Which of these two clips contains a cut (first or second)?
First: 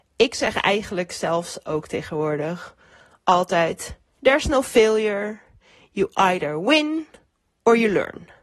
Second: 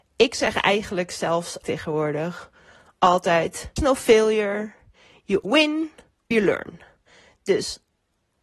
second